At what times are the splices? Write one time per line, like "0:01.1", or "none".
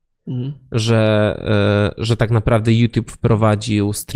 none